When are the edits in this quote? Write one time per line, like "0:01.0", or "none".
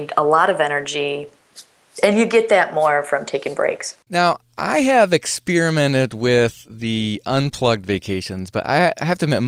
0:04.0